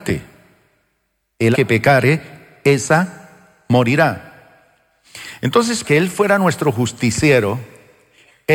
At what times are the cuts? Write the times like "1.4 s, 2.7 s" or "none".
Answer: 1.5 s, 5.8 s